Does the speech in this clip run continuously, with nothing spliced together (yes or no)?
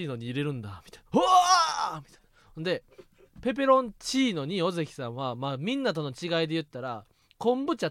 yes